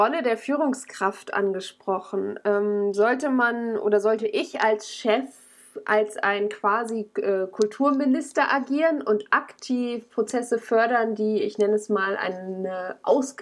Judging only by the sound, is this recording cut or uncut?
uncut